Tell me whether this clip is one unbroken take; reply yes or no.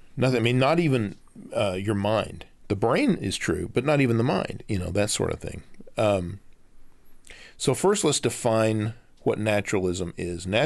yes